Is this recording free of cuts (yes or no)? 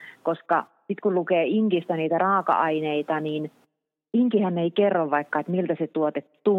yes